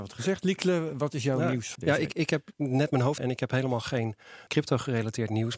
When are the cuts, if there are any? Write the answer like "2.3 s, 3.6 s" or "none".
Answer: 1.8 s, 2.5 s, 3.2 s, 4.5 s

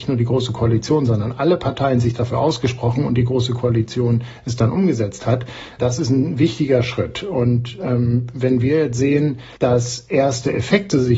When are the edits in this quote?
5.8 s, 9.6 s

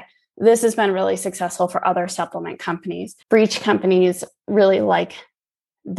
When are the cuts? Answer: 3.2 s

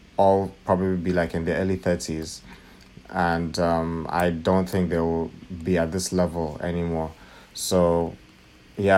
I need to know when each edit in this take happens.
none

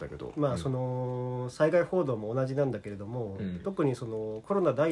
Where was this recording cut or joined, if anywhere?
none

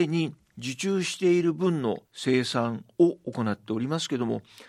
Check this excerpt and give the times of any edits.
2.0 s

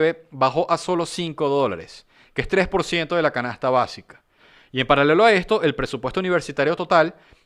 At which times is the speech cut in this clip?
none

